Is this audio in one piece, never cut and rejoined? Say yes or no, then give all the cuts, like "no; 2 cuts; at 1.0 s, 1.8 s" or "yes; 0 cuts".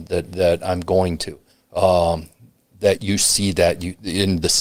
no; 2 cuts; at 1.5 s, 3.0 s